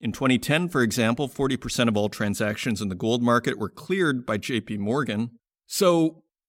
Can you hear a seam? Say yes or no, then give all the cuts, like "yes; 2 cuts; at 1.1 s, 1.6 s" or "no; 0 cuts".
no; 0 cuts